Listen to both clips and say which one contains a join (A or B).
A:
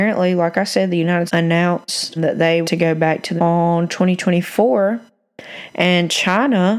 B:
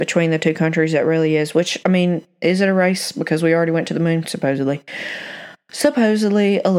A